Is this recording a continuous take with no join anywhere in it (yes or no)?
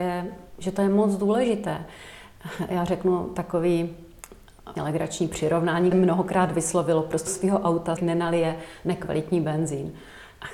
no